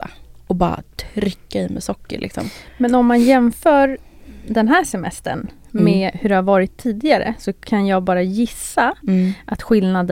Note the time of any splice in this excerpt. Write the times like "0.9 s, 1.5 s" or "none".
none

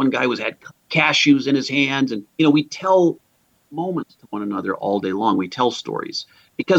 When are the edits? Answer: 2.3 s, 3.3 s

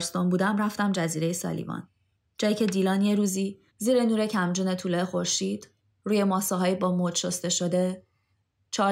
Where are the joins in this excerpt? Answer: 2.1 s, 3.7 s, 5.8 s

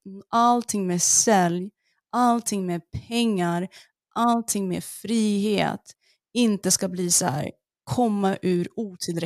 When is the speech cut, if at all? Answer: none

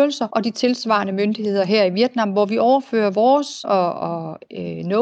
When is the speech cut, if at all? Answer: 3.6 s

